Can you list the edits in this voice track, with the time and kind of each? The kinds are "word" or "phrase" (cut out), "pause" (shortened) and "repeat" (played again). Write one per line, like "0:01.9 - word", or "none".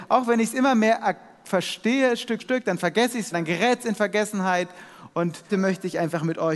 0:02.4 - word
0:03.3 - word
0:05.5 - word